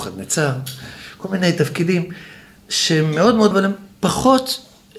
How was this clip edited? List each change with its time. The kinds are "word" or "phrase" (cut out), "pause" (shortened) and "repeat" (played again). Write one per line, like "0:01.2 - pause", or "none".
0:03.5 - word